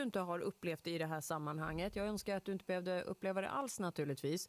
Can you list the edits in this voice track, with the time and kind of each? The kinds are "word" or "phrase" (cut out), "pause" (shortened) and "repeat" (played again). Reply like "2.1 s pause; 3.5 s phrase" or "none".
none